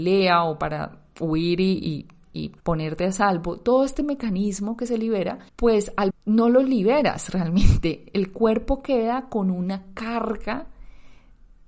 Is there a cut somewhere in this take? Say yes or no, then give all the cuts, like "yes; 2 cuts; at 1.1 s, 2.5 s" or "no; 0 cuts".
yes; 3 cuts; at 2.6 s, 5.5 s, 6.1 s